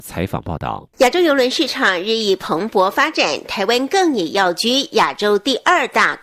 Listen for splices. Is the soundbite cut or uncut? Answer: cut